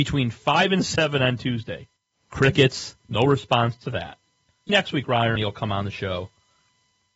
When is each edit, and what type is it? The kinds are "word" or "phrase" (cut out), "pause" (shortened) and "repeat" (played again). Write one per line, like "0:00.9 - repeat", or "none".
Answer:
0:02.0 - pause
0:04.7 - word
0:05.4 - word